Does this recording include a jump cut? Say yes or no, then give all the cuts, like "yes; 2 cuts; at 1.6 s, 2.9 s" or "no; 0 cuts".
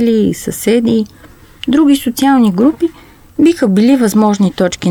no; 0 cuts